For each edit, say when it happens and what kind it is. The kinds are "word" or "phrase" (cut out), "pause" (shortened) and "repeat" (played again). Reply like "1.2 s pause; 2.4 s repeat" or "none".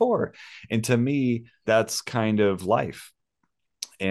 1.6 s word